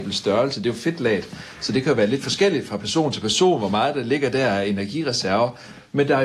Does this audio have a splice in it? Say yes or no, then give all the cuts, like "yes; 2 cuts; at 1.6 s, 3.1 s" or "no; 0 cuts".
no; 0 cuts